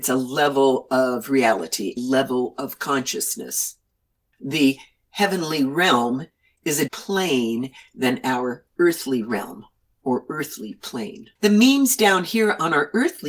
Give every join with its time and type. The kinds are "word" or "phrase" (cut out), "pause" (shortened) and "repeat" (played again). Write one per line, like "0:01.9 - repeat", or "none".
0:02.0 - word
0:06.9 - word
0:11.3 - pause